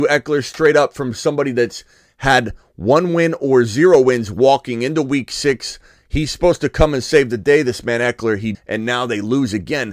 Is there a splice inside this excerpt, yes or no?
yes